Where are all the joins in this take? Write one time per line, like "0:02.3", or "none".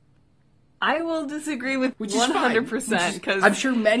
0:01.9